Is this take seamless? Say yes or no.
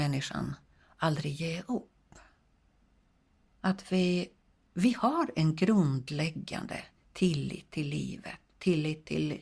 yes